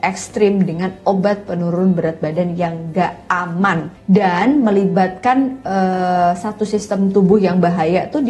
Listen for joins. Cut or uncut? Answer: cut